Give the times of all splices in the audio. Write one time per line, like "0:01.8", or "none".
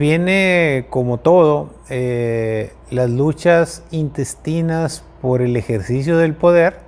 none